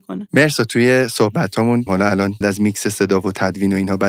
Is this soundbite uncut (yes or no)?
no